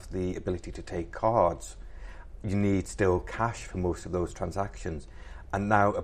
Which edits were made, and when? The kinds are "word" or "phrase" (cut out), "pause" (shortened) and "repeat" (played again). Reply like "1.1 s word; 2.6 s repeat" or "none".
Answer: none